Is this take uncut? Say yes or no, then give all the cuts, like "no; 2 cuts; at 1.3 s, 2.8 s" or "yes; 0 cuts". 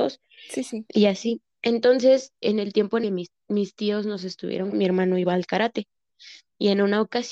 no; 3 cuts; at 2.4 s, 3.0 s, 4.7 s